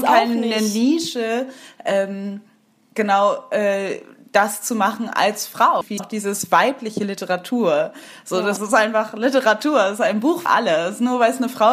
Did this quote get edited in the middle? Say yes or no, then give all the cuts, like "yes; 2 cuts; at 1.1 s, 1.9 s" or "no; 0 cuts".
yes; 3 cuts; at 6.0 s, 8.6 s, 10.5 s